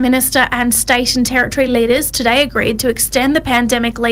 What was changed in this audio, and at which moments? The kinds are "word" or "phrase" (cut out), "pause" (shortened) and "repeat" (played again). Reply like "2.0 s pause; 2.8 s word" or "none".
none